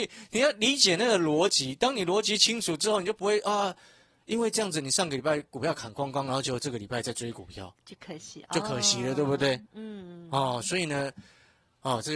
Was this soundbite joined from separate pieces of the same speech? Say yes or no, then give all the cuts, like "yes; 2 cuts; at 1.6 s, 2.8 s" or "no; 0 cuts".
no; 0 cuts